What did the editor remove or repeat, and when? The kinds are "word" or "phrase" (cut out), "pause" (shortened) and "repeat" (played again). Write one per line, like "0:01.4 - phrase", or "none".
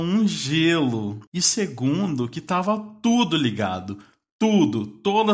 0:01.3 - pause